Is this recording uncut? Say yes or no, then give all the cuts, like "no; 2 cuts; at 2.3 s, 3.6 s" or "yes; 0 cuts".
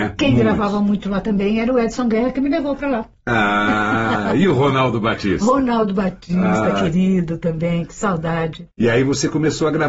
no; 1 cut; at 8.7 s